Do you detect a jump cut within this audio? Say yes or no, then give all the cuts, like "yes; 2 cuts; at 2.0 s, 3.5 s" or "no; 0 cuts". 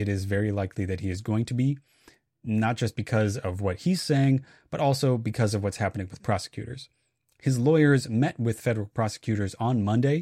no; 0 cuts